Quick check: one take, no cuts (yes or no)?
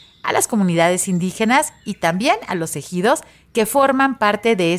yes